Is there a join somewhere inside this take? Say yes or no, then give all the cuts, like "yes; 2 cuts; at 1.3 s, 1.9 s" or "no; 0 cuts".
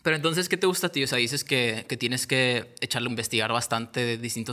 yes; 1 cut; at 3.1 s